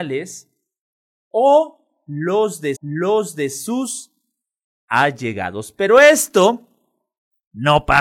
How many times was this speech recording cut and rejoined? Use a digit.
1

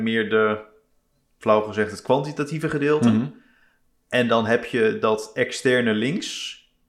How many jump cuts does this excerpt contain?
0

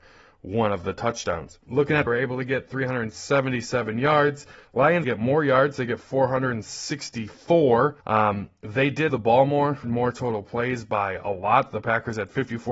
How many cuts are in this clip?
6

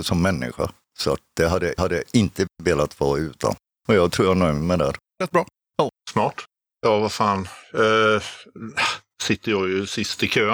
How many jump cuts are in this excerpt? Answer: 2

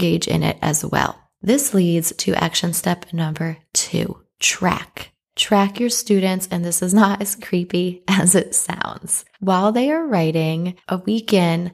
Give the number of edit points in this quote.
2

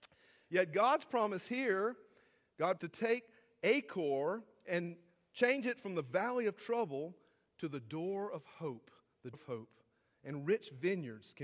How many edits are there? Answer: 2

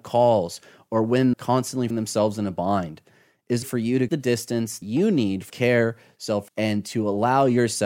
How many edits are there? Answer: 7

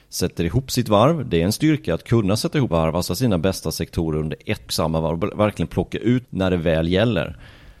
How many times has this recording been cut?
4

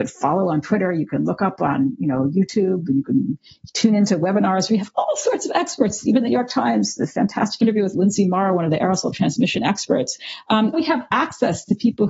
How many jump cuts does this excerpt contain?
1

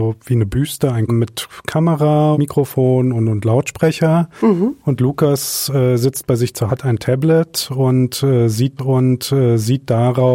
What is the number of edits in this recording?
4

